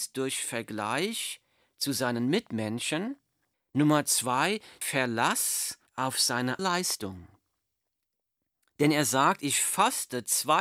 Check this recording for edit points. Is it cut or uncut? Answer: cut